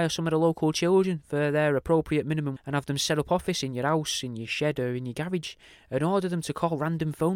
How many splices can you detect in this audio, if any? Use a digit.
1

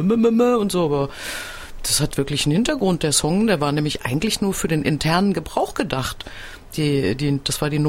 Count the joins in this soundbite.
0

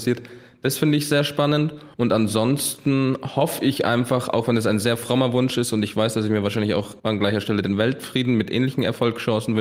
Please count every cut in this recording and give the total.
2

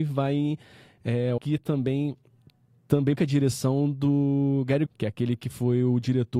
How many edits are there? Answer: 3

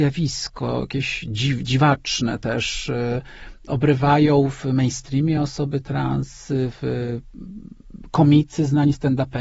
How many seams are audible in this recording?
0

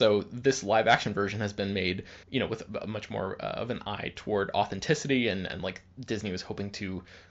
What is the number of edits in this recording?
1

